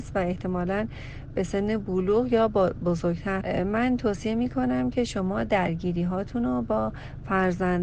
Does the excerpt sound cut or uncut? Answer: cut